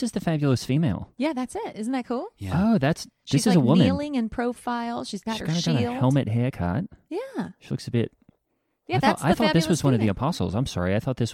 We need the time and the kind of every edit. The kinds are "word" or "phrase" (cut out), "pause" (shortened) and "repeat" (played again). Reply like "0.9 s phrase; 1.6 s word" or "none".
none